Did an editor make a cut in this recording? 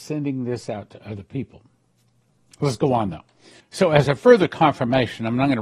no; 0 cuts

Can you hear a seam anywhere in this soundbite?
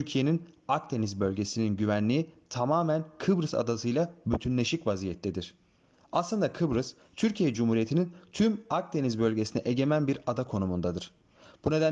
no; 0 cuts

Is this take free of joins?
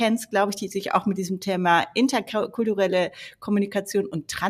yes; 0 cuts

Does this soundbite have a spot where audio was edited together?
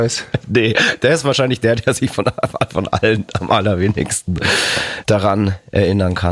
no; 0 cuts

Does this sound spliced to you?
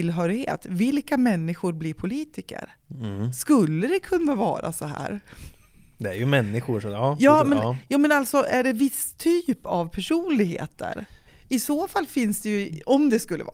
no; 0 cuts

